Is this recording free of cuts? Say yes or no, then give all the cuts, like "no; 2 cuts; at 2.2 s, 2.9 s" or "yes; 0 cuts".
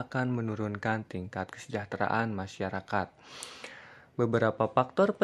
yes; 0 cuts